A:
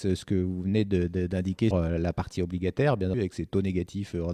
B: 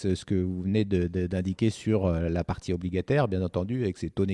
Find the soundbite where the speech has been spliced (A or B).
A